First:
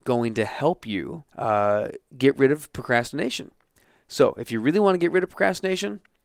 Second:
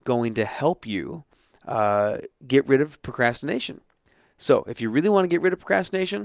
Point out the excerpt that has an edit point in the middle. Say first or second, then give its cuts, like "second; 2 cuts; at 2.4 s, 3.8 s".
first; 1 cut; at 1.3 s